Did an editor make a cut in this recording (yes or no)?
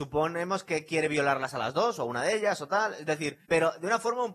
yes